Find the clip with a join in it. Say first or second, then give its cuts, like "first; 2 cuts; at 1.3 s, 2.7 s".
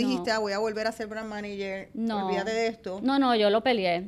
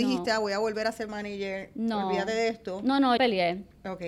second; 2 cuts; at 1.1 s, 3.2 s